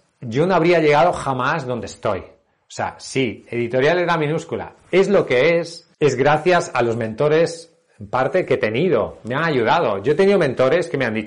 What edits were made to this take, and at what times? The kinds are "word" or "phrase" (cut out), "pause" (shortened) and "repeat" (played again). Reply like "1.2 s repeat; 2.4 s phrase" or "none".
5.9 s pause